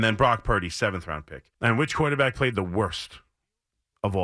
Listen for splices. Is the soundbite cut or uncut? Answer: cut